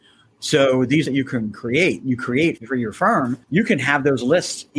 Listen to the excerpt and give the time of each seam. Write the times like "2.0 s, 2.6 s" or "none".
1.1 s, 2.6 s, 3.4 s